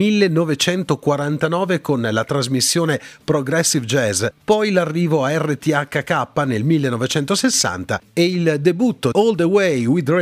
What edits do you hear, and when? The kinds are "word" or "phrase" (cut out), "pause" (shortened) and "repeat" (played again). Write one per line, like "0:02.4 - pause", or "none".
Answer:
0:09.1 - word